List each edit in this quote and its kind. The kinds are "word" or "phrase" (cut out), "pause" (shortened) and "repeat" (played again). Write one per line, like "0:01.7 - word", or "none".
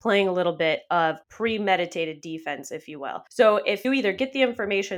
0:01.2 - pause
0:03.3 - pause
0:03.8 - word